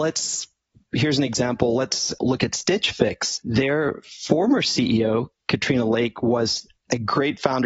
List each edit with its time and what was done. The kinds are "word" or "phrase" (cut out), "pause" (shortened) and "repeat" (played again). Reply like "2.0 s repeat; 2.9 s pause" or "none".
none